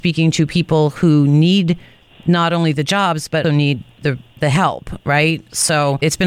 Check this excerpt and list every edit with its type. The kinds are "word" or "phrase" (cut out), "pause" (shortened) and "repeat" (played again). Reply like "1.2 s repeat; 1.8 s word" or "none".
3.4 s word